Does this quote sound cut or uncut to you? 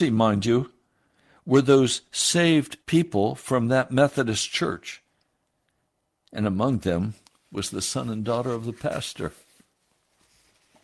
cut